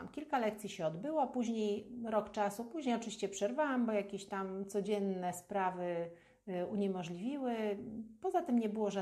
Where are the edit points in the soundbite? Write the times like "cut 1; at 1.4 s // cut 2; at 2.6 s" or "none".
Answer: none